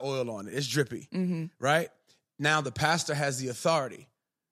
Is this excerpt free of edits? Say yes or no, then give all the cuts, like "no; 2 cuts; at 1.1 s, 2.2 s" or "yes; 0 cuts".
yes; 0 cuts